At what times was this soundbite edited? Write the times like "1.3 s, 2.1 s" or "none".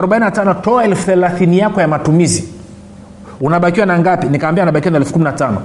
none